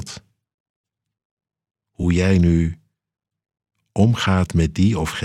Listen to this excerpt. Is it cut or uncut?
uncut